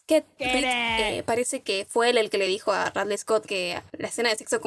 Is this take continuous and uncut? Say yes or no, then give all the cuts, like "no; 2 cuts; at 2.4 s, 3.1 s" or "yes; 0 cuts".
yes; 0 cuts